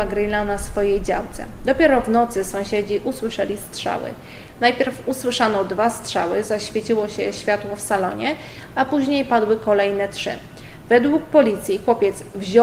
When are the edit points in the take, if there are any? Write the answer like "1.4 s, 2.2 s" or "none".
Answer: none